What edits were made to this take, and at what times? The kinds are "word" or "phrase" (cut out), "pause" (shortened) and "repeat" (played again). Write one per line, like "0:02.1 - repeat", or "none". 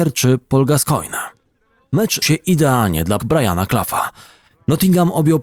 0:02.2 - word
0:03.2 - word